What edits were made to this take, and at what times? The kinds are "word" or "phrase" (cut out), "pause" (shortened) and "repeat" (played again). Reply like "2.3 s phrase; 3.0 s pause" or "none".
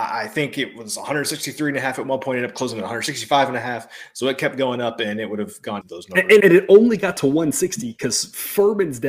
5.8 s phrase; 6.4 s word